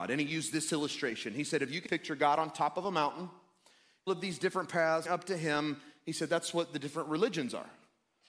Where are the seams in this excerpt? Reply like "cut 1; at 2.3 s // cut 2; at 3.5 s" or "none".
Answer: cut 1; at 1.8 s // cut 2; at 4.1 s // cut 3; at 5.0 s